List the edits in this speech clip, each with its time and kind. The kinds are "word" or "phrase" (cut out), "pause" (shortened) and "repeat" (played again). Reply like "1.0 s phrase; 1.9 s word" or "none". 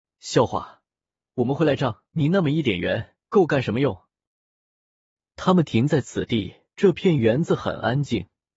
2.1 s pause; 3.3 s pause; 6.7 s pause